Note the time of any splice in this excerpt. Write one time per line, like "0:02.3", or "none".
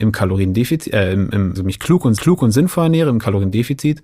0:01.5
0:02.2